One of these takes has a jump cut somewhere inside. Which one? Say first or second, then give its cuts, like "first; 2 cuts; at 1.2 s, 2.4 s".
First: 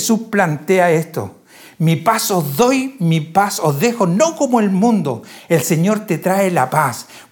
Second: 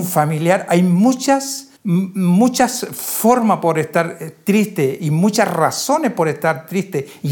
second; 1 cut; at 1.8 s